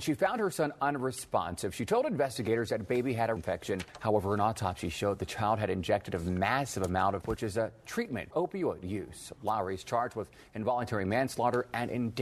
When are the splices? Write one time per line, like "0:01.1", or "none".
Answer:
0:03.4
0:07.2
0:08.3